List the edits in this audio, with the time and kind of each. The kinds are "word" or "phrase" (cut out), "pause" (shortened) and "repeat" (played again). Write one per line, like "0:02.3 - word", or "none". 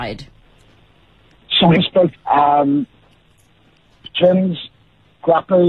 0:01.7 - word
0:02.1 - word